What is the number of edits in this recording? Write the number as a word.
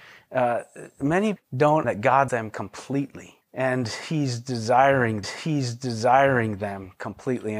five